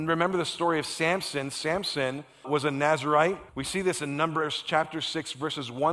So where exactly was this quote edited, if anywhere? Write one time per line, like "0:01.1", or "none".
0:02.4
0:03.5